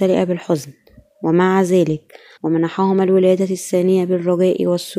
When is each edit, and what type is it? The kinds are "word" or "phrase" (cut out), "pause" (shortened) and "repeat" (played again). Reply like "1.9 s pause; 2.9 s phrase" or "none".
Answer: 2.4 s phrase